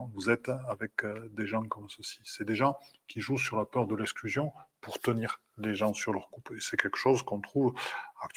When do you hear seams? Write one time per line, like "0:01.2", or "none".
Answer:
none

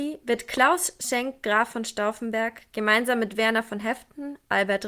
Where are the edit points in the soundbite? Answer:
none

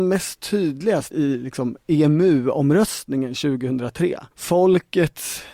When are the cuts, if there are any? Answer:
0:01.1
0:04.3

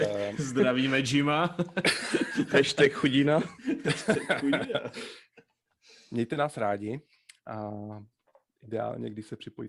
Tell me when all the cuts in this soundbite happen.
none

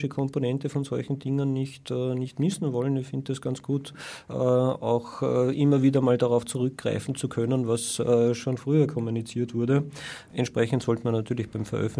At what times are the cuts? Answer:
0:08.4

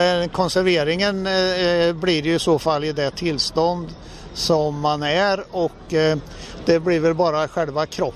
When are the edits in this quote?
none

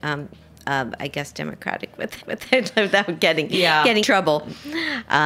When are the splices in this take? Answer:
0:02.2
0:04.0

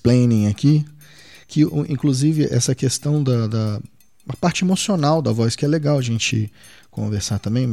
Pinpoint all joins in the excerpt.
none

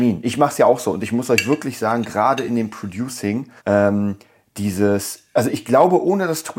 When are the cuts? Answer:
0:03.6

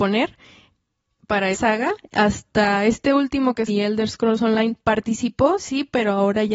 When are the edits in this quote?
0:01.5
0:03.7

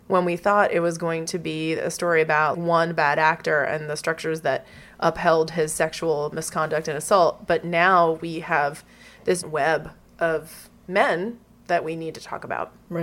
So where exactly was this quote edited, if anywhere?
0:02.5
0:09.4

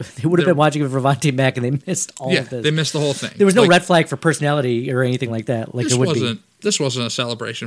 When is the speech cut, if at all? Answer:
none

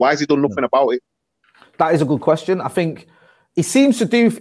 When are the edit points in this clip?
none

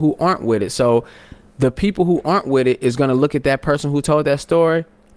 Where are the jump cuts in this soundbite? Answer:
none

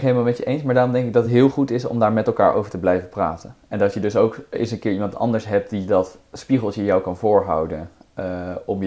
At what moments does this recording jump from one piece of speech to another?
none

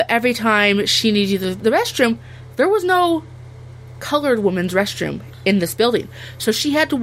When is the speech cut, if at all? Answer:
0:01.6

